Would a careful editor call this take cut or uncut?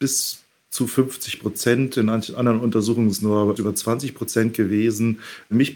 cut